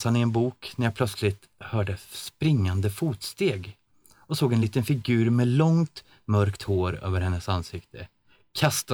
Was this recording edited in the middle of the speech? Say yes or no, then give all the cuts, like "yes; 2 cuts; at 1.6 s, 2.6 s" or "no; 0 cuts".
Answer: no; 0 cuts